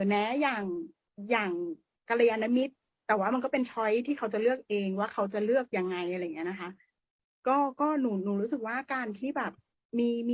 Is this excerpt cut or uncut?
uncut